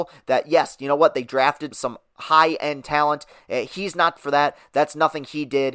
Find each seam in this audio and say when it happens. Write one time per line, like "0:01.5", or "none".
0:01.7
0:04.2